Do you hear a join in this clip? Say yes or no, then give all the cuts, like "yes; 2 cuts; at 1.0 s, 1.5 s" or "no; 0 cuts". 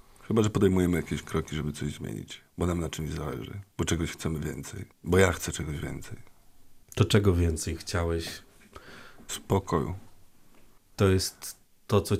yes; 4 cuts; at 2.5 s, 3.7 s, 4.9 s, 6.8 s